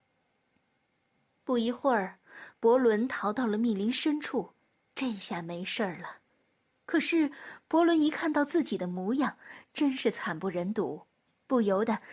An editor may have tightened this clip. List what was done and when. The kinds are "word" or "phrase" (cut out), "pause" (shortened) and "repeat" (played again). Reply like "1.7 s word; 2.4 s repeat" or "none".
none